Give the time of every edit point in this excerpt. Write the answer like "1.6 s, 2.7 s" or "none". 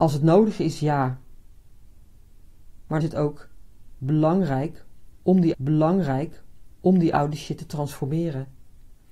3.0 s, 5.5 s